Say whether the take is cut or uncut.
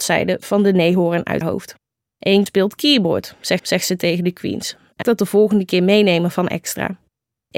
cut